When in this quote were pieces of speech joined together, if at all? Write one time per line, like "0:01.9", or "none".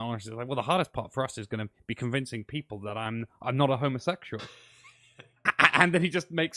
none